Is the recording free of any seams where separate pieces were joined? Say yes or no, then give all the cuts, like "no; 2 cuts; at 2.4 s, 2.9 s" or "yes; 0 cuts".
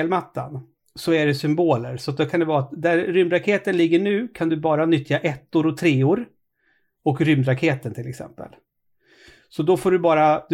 yes; 0 cuts